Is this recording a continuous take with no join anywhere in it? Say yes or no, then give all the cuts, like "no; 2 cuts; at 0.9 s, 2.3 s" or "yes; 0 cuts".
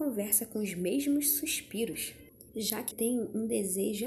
no; 2 cuts; at 2.5 s, 2.9 s